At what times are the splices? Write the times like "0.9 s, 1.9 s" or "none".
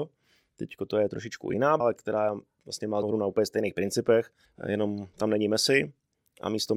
1.8 s, 3.0 s, 4.4 s